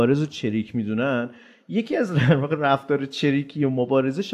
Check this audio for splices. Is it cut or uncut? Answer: uncut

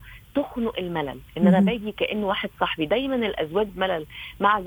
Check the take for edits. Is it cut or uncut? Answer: cut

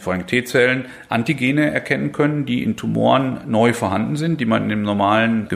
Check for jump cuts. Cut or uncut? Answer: uncut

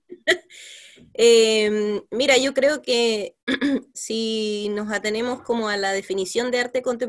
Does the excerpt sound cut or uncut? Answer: cut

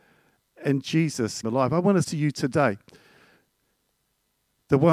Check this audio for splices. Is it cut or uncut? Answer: cut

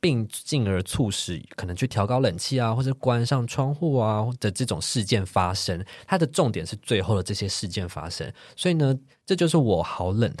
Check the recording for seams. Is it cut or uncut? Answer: uncut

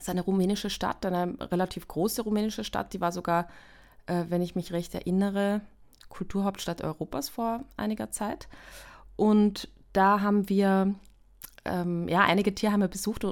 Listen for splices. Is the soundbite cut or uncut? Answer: uncut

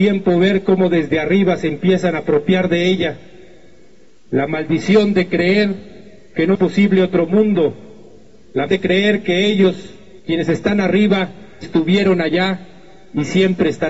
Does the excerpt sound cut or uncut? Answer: cut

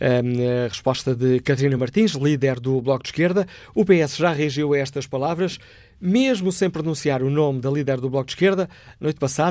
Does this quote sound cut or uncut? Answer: uncut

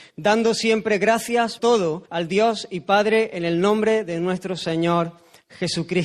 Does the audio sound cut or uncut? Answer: cut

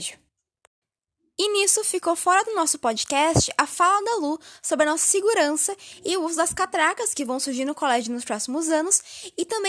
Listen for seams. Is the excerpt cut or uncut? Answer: uncut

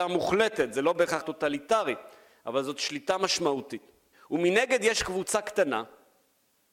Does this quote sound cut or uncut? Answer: cut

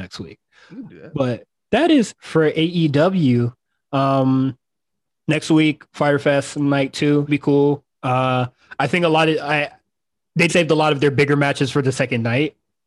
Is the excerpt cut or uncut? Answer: cut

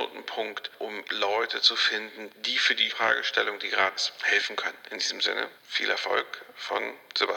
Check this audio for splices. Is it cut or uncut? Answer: cut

